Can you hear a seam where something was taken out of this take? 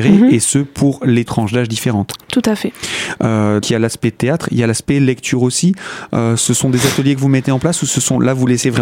yes; 2 cuts; at 1.3 s, 3.6 s

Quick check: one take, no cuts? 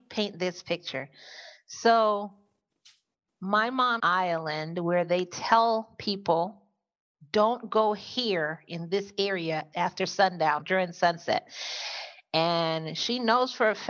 no; 3 cuts; at 4.0 s, 9.7 s, 10.6 s

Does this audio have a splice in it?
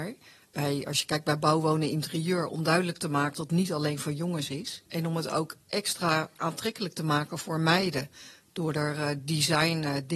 yes; 2 cuts; at 3.3 s, 4.9 s

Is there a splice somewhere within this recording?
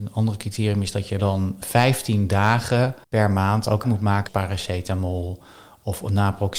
yes; 5 cuts; at 1.2 s, 1.6 s, 3.0 s, 3.8 s, 4.3 s

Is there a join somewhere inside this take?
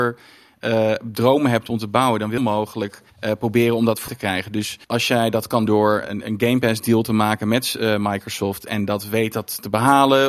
yes; 6 cuts; at 2.4 s, 3.1 s, 4.1 s, 4.8 s, 5.7 s, 6.0 s

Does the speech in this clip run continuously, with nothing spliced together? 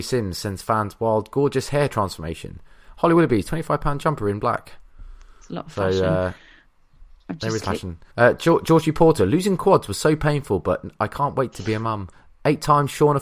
no; 4 cuts; at 7.2 s, 7.6 s, 8.1 s, 12.1 s

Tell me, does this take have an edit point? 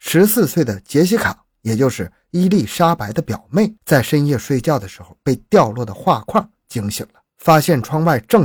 yes; 2 cuts; at 3.8 s, 7.3 s

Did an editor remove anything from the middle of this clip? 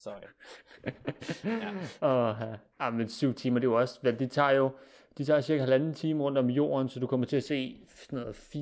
no; 0 cuts

